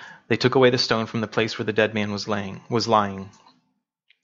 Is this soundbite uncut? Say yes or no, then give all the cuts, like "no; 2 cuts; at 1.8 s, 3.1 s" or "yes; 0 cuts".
yes; 0 cuts